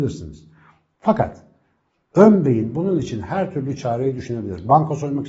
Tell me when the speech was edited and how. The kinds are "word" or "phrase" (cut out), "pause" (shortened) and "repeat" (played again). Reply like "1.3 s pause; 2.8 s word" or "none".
none